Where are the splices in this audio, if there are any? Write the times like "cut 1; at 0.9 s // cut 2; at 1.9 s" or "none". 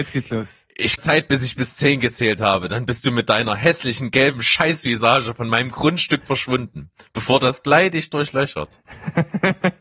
cut 1; at 1.0 s